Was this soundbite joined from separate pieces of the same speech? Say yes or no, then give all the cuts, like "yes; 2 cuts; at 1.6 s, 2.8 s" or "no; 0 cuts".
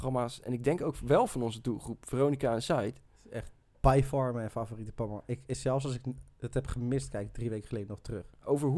no; 0 cuts